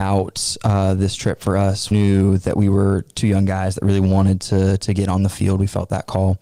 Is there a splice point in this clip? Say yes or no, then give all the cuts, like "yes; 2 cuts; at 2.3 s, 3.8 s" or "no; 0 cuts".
yes; 1 cut; at 1.9 s